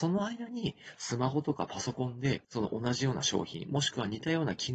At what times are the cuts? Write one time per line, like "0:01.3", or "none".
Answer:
0:02.4